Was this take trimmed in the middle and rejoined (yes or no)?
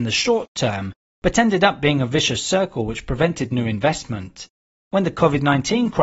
no